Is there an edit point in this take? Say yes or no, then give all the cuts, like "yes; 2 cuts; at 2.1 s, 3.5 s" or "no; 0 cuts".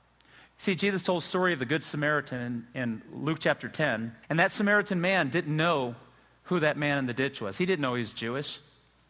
yes; 1 cut; at 4.2 s